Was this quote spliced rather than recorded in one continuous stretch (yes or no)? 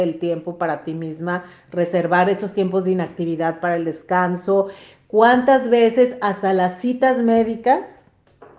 no